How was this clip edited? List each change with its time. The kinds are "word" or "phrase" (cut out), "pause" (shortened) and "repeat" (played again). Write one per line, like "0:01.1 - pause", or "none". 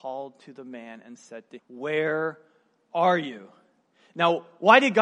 0:01.6 - word